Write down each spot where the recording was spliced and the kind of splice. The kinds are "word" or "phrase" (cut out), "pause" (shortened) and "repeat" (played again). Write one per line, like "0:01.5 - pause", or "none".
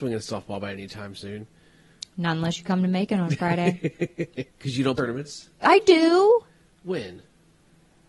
0:04.5 - pause
0:05.0 - word
0:05.5 - pause